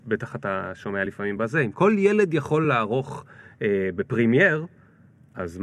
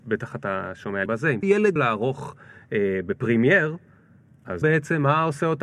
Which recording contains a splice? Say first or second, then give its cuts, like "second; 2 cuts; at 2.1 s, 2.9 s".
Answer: second; 4 cuts; at 1.1 s, 1.4 s, 1.8 s, 4.6 s